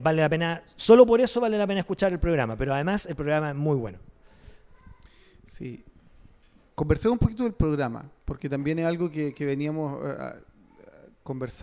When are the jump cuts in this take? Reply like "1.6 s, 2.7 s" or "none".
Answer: none